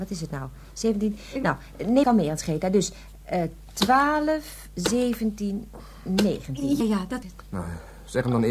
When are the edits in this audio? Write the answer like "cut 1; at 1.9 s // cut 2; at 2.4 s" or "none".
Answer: cut 1; at 2.0 s // cut 2; at 6.8 s // cut 3; at 7.2 s